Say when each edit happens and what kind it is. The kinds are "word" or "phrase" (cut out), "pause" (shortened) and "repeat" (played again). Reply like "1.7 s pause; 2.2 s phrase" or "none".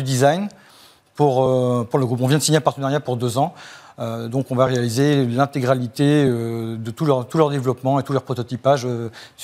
none